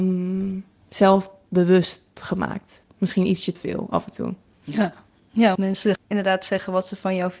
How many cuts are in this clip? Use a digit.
3